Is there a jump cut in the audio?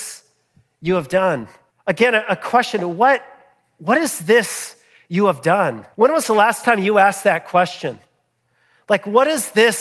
yes; 2 cuts; at 1.7 s, 5.9 s

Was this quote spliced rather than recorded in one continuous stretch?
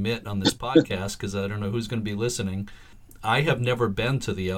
no; 0 cuts

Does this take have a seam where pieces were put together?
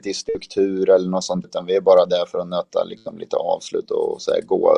yes; 1 cut; at 1.4 s

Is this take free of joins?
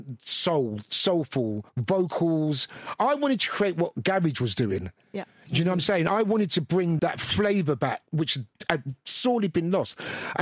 no; 2 cuts; at 1.7 s, 7.0 s

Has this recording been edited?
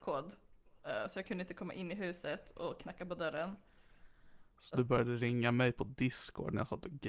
yes; 1 cut; at 4.5 s

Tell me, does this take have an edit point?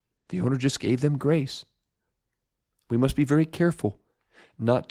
no; 0 cuts

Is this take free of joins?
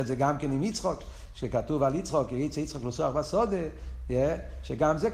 yes; 0 cuts

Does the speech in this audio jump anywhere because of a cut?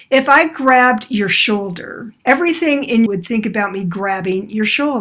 yes; 2 cuts; at 2.2 s, 3.1 s

